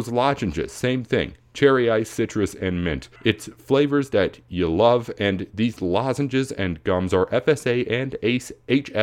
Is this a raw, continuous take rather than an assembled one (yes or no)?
no